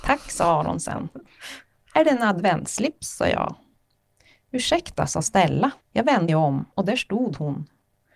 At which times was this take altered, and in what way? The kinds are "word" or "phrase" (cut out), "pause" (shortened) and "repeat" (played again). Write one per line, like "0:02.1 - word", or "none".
0:05.8 - pause
0:06.3 - word
0:06.7 - pause

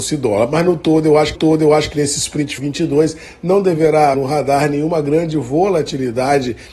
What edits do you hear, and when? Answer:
0:01.3 - repeat
0:02.6 - phrase
0:04.1 - word

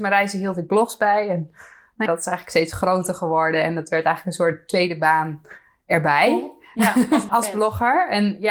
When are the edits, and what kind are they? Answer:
0:02.1 - word
0:07.3 - word

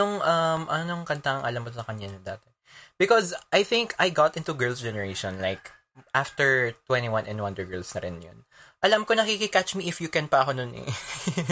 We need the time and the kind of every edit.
none

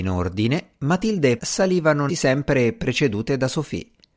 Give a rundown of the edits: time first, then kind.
0:01.4 - word
0:02.1 - phrase

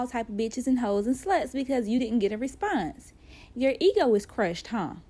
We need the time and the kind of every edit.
none

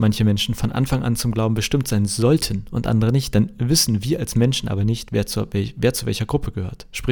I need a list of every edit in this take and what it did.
none

